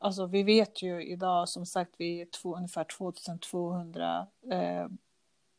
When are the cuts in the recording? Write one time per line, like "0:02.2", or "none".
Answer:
none